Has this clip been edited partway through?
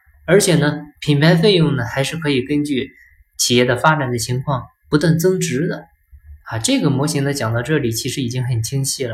yes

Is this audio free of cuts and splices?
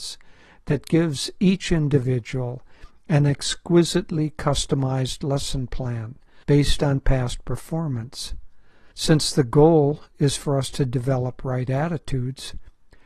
no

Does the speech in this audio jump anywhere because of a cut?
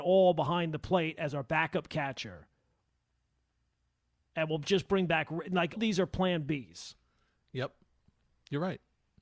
yes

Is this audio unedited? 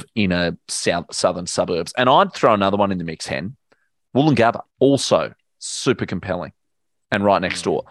no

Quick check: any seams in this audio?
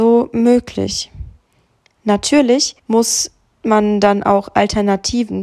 yes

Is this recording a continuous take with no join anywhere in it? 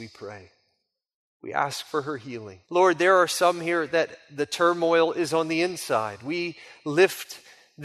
no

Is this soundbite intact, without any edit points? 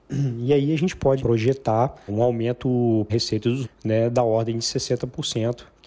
no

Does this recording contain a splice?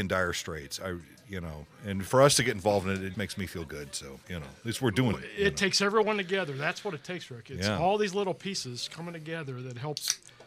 yes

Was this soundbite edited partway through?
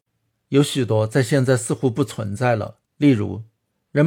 yes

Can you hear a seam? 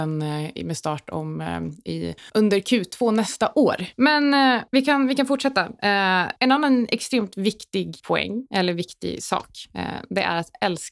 no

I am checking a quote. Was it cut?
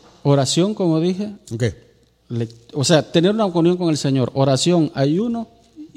no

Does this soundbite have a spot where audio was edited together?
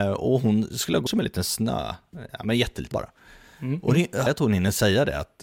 yes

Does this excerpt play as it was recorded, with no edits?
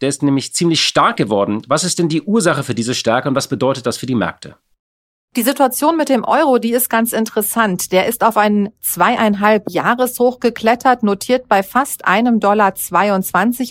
yes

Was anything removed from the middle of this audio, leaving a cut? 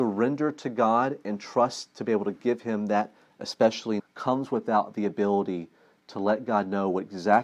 yes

